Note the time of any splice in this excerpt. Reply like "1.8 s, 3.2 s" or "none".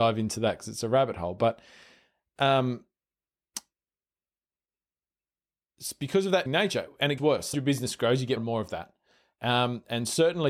6.5 s, 7.2 s, 7.5 s, 8.4 s